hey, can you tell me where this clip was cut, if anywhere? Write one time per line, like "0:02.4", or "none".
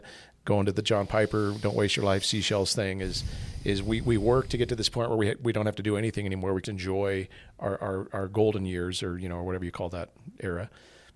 0:06.6